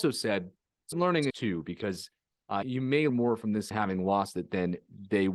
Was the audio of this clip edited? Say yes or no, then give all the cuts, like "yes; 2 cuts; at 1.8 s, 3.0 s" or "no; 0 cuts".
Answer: yes; 5 cuts; at 0.9 s, 1.3 s, 2.6 s, 3.1 s, 3.7 s